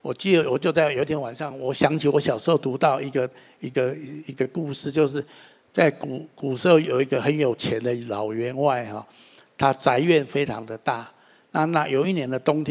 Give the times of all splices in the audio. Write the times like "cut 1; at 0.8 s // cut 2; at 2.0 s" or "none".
none

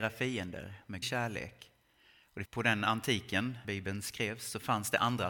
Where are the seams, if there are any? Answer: cut 1; at 1.0 s // cut 2; at 2.5 s // cut 3; at 3.6 s

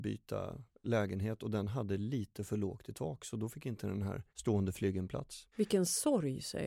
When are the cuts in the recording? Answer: cut 1; at 4.3 s // cut 2; at 5.5 s

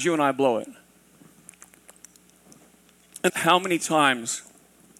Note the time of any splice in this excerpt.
cut 1; at 3.3 s

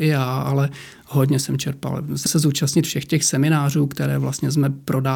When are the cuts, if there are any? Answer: cut 1; at 2.3 s

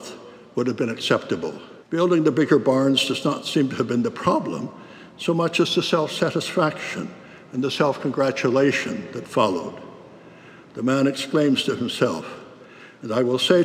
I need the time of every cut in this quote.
cut 1; at 1.8 s

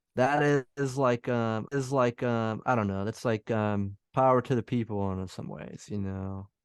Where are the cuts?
cut 1; at 1.7 s // cut 2; at 4.0 s

